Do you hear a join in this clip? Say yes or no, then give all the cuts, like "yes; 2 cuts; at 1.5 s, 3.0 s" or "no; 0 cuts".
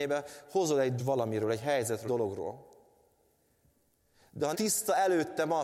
yes; 3 cuts; at 1.0 s, 2.1 s, 4.5 s